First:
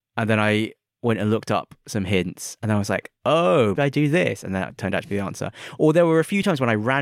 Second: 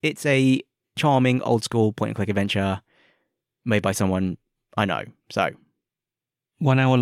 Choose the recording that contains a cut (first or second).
first